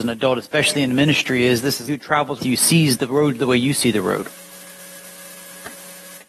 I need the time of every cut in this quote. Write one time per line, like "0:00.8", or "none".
0:01.9
0:02.4

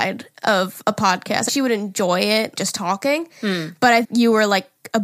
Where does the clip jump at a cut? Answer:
0:01.5
0:02.6
0:04.0

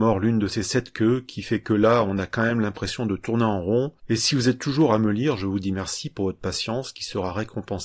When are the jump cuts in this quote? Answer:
0:04.0

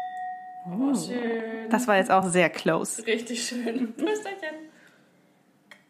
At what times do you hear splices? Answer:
none

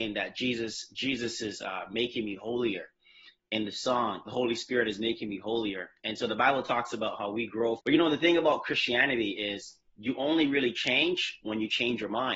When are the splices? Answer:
0:04.3
0:07.8
0:09.9

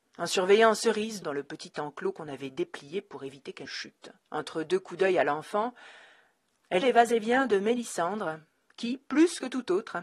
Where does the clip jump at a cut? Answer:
0:01.2
0:03.7
0:04.2
0:06.8

